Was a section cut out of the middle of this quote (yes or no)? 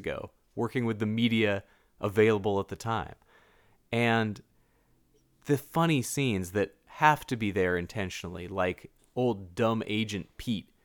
no